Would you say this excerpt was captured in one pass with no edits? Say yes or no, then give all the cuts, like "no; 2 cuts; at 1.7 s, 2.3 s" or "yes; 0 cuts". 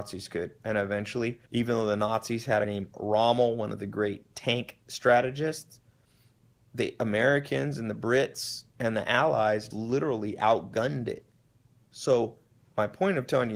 no; 3 cuts; at 1.5 s, 2.6 s, 9.7 s